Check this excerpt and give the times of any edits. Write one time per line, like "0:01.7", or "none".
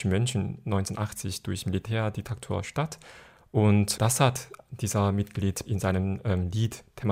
0:04.0
0:05.7